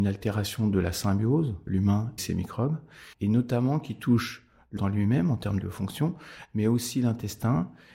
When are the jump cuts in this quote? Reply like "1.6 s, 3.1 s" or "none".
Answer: 1.7 s, 2.2 s, 3.1 s, 4.8 s, 5.6 s